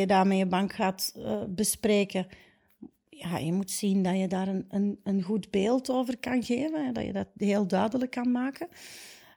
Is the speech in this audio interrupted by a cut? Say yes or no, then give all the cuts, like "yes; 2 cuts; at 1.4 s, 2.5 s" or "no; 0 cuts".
no; 0 cuts